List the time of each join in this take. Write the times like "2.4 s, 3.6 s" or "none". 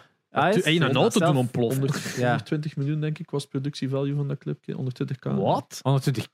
none